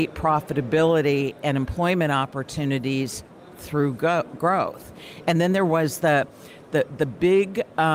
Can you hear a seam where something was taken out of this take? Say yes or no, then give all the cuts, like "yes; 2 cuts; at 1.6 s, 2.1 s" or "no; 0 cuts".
no; 0 cuts